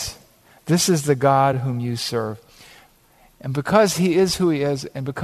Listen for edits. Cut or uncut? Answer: uncut